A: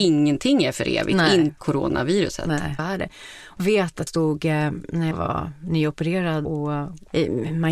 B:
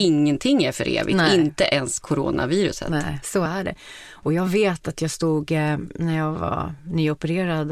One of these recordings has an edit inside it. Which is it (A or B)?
A